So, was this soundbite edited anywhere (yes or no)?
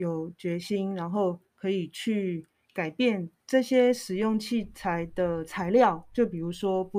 yes